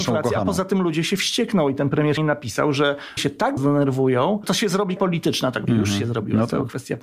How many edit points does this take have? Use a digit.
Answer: 6